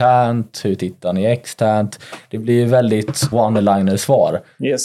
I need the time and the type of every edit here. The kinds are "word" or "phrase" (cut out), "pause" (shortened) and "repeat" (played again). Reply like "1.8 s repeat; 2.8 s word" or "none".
3.3 s word